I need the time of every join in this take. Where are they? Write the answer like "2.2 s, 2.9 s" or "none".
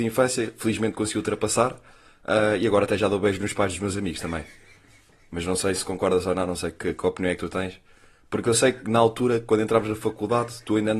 none